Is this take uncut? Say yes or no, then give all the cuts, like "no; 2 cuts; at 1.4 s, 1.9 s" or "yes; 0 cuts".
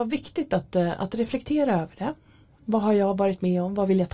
yes; 0 cuts